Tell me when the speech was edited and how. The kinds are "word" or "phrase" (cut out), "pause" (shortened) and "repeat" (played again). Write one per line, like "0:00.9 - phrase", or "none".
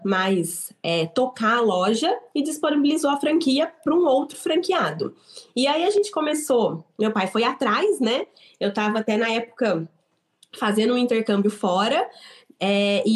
none